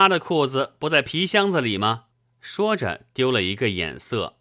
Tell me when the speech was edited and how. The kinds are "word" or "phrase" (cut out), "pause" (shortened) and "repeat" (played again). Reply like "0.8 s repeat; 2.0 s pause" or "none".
2.1 s pause